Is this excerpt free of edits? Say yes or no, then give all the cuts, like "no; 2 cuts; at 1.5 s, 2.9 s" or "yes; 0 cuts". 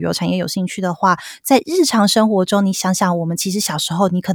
yes; 0 cuts